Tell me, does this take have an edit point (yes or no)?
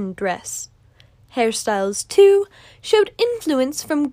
no